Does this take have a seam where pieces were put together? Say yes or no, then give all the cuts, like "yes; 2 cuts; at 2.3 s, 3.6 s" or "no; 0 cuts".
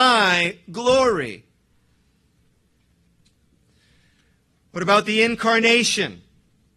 no; 0 cuts